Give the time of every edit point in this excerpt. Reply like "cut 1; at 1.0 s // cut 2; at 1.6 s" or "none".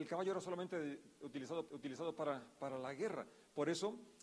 cut 1; at 1.7 s